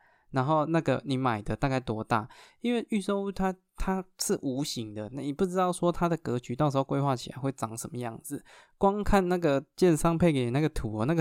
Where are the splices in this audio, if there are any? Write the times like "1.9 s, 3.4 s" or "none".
none